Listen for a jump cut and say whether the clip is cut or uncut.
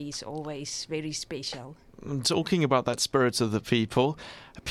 uncut